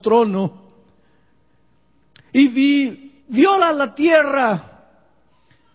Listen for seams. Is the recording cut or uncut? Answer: cut